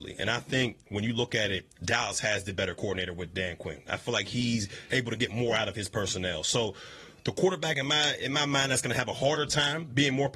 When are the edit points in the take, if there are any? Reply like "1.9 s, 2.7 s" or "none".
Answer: 1.7 s